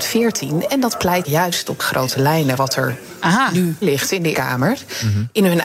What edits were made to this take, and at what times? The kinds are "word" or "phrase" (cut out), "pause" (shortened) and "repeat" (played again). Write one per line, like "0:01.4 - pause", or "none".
0:01.2 - word
0:01.8 - word
0:02.6 - word
0:03.8 - word
0:04.3 - word